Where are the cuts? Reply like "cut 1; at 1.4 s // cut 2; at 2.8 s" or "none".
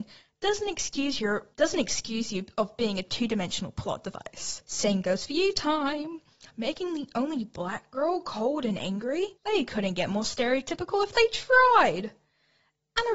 cut 1; at 1.5 s // cut 2; at 4.6 s // cut 3; at 9.3 s